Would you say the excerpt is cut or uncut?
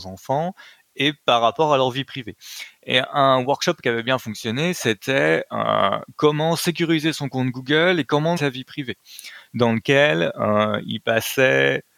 cut